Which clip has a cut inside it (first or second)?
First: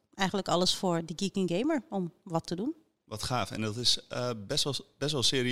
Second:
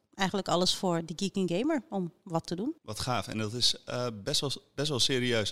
second